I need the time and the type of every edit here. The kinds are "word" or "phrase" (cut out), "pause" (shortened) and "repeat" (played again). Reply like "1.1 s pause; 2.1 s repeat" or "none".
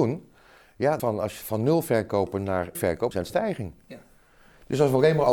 1.0 s phrase; 2.7 s word; 3.1 s word

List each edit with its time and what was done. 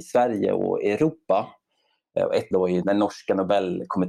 2.5 s word; 2.8 s word

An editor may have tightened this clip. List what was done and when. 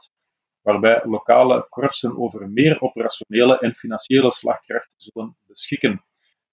none

